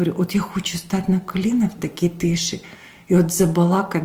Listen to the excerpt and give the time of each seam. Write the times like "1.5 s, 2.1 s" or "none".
none